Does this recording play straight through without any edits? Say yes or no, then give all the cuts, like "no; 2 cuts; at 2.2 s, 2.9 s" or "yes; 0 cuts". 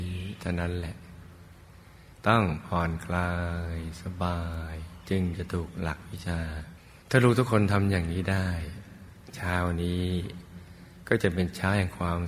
no; 1 cut; at 7.0 s